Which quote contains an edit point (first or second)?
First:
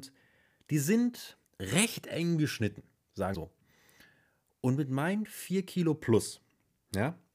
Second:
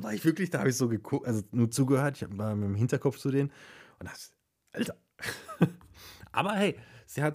first